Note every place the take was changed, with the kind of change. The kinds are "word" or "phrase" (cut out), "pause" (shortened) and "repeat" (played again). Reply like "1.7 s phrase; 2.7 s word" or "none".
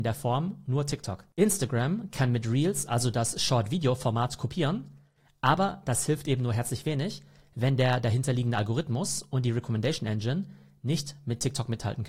none